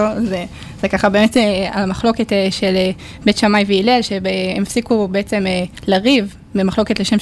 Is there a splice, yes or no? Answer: no